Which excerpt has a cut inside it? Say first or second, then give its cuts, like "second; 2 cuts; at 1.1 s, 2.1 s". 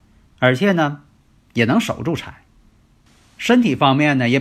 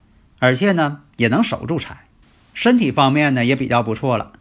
second; 2 cuts; at 1.1 s, 2.2 s